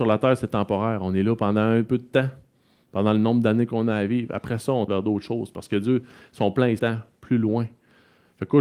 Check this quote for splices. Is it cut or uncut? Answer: cut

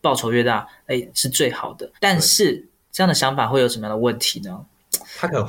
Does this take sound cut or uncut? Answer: cut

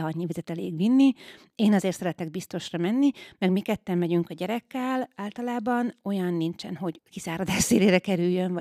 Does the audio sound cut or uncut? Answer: cut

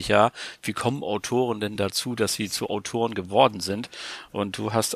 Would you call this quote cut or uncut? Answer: uncut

